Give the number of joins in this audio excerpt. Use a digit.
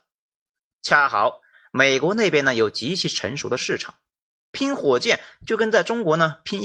0